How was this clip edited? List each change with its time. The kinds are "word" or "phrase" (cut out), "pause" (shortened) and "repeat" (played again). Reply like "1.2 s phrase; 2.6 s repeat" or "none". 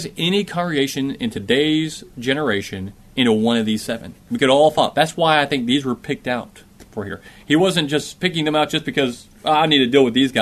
4.2 s pause